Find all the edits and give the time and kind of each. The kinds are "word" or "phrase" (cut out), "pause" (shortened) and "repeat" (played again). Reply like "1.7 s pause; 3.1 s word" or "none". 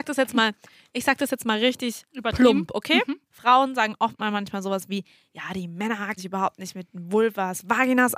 3.3 s pause; 6.2 s word